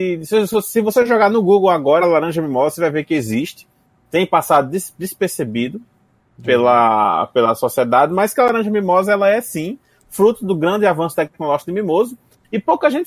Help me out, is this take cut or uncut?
uncut